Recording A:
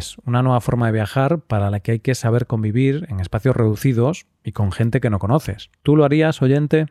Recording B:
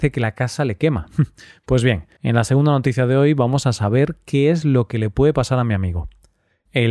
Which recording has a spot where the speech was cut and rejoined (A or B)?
B